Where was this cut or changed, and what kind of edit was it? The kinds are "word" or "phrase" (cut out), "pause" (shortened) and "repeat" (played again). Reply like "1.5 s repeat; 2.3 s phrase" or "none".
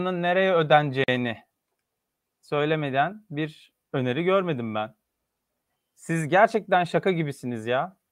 3.8 s pause